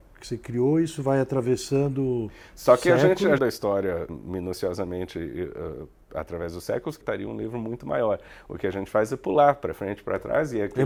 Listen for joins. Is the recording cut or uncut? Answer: cut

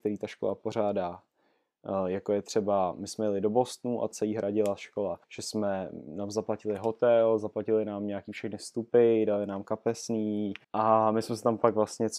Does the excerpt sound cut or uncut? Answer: cut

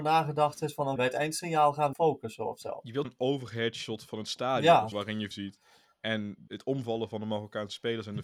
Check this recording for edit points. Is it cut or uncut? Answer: cut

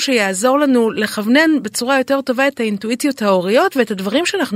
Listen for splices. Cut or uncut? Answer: uncut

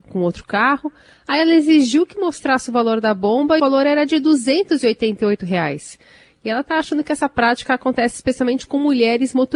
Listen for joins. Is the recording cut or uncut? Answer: cut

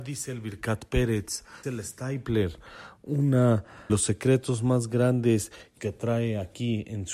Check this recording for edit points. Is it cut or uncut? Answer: cut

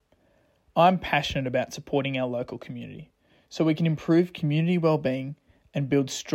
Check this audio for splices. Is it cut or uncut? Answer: uncut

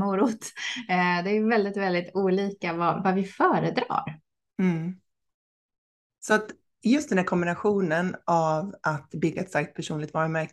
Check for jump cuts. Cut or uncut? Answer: uncut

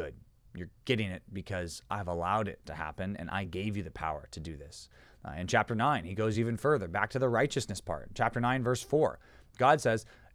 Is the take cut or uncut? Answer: uncut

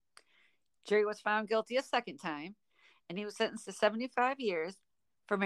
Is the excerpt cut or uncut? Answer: uncut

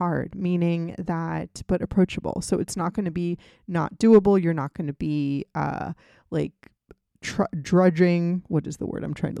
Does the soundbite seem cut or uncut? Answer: uncut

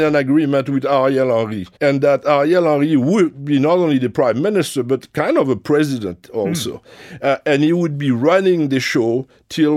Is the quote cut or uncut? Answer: cut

